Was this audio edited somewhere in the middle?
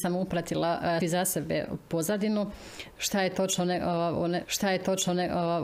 yes; 2 cuts; at 1.0 s, 4.4 s

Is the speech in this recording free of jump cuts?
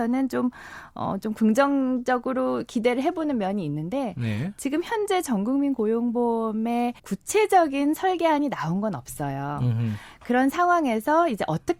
no; 1 cut; at 7.0 s

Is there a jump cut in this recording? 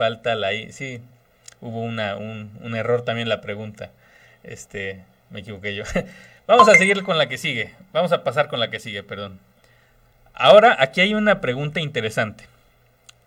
no; 0 cuts

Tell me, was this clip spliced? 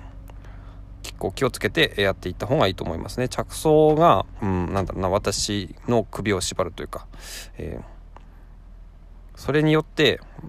yes; 1 cut; at 4.4 s

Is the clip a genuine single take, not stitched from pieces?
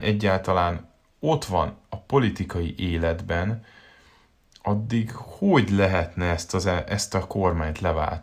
yes; 0 cuts

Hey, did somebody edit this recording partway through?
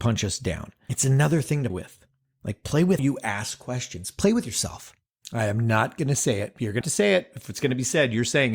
yes; 3 cuts; at 1.7 s, 3.0 s, 6.8 s

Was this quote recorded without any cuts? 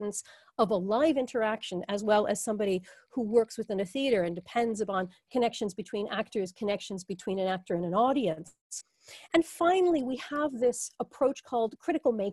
yes; 0 cuts

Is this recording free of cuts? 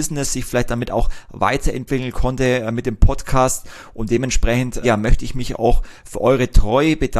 no; 1 cut; at 4.8 s

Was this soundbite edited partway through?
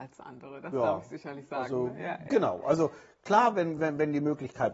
no; 0 cuts

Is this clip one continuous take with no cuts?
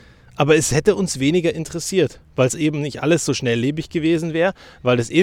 yes; 0 cuts

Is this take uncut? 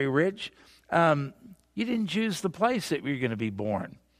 yes; 0 cuts

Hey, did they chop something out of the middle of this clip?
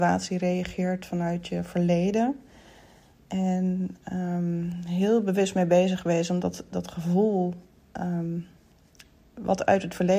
no; 0 cuts

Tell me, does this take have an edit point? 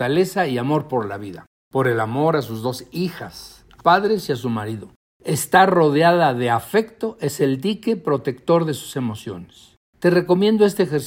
yes; 1 cut; at 3.8 s

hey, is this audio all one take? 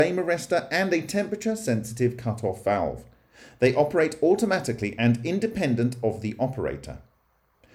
yes; 0 cuts

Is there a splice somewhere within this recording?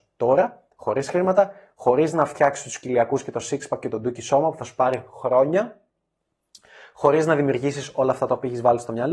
no; 0 cuts

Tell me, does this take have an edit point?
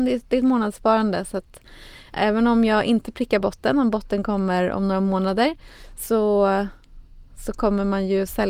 no; 0 cuts

